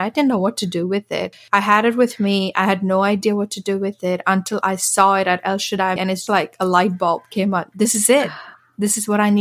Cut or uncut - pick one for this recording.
cut